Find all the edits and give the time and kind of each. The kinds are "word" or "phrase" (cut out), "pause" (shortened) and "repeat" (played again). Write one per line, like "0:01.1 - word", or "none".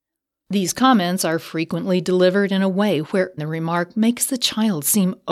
0:03.4 - word